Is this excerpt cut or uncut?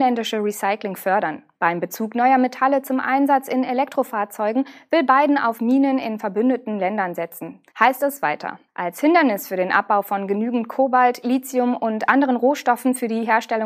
cut